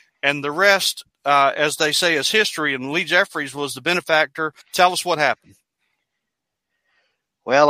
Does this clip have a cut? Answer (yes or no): yes